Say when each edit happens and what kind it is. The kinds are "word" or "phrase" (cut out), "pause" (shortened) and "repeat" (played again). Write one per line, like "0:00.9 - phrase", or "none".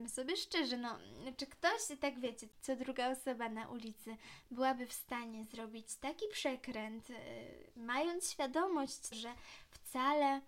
0:09.1 - word